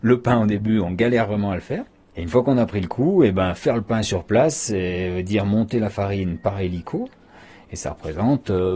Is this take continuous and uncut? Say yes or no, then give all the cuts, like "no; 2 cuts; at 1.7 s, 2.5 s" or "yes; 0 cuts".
yes; 0 cuts